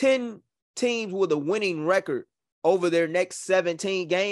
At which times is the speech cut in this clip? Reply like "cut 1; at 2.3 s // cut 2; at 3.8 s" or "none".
none